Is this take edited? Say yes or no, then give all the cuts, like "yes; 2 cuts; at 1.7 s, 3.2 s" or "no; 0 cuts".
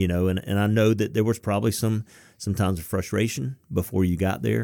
no; 0 cuts